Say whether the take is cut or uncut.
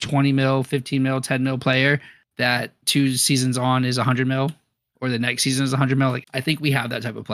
cut